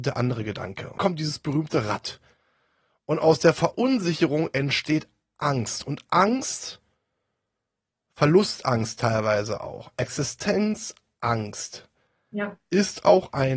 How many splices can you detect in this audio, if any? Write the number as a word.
one